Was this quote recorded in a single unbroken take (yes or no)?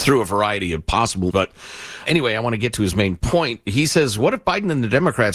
no